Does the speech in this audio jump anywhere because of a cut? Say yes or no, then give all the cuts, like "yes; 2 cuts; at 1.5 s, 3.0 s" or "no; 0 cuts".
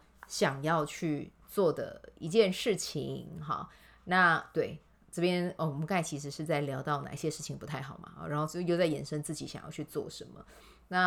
no; 0 cuts